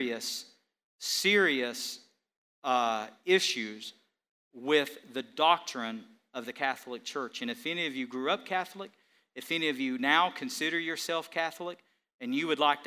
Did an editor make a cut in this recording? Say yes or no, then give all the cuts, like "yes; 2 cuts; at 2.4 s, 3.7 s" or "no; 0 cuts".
no; 0 cuts